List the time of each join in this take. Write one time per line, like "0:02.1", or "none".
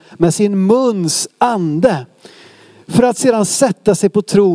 none